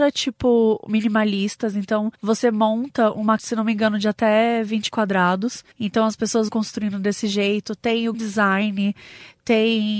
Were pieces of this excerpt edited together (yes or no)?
yes